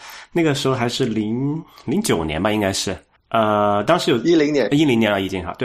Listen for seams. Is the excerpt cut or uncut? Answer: cut